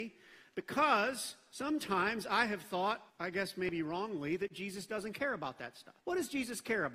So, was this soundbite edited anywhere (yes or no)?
yes